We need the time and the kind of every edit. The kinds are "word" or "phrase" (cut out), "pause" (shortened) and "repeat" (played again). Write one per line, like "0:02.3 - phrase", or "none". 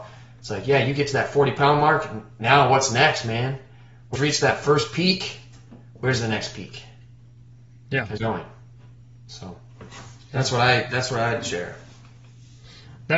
0:04.2 - word
0:08.2 - word